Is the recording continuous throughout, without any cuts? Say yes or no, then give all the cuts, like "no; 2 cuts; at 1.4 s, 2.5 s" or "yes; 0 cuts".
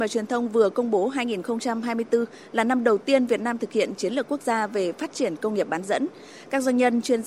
yes; 0 cuts